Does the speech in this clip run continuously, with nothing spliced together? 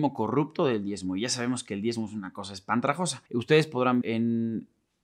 no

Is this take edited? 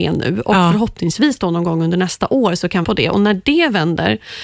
yes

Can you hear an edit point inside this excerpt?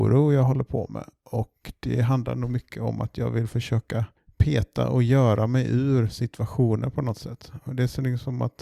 yes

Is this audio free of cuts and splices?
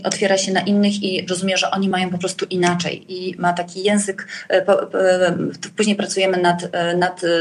yes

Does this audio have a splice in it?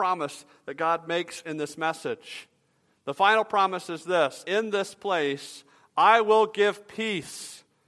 yes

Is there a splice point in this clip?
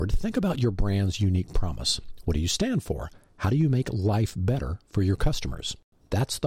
no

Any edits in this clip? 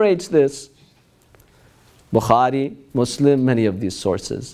no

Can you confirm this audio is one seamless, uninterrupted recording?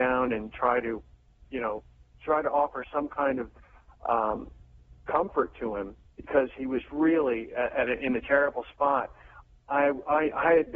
yes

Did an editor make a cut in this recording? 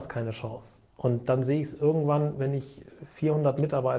no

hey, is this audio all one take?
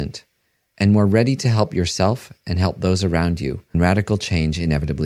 no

